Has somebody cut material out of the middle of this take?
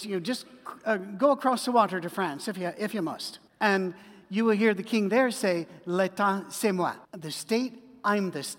yes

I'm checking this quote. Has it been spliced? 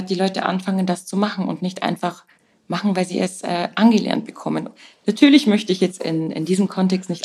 no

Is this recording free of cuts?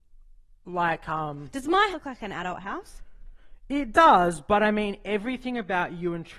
no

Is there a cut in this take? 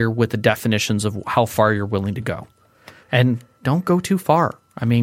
no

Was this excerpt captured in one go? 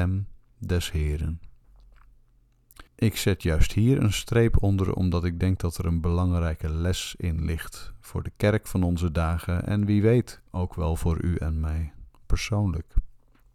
no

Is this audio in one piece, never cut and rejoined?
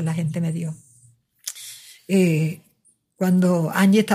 yes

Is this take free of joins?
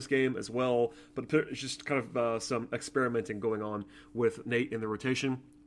yes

